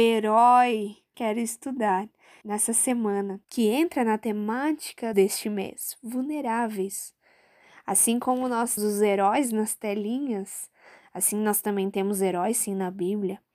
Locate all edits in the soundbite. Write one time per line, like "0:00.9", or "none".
0:01.1
0:02.4
0:03.4
0:05.1
0:08.8